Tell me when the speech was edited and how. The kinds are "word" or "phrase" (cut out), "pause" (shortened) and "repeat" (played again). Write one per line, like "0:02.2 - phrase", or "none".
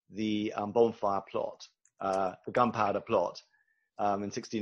none